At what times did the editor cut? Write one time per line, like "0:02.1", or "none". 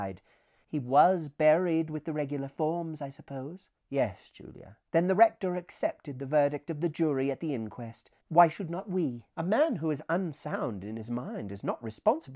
0:03.8
0:04.9
0:08.2
0:09.3